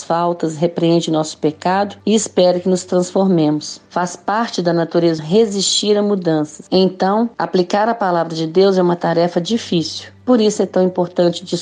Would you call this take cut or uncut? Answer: cut